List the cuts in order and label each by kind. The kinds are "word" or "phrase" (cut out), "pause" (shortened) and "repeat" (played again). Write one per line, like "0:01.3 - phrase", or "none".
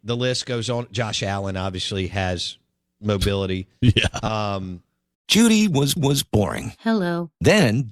0:06.0 - repeat